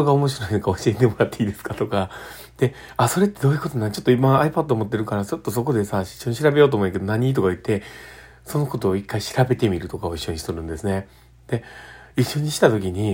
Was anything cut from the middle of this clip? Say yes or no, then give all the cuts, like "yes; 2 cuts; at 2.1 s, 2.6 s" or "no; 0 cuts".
no; 0 cuts